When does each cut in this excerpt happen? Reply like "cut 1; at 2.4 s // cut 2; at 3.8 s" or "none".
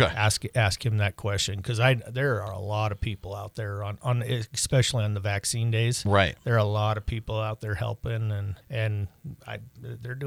cut 1; at 8.6 s

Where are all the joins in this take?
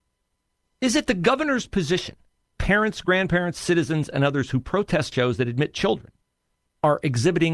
cut 1; at 2.6 s // cut 2; at 5.1 s

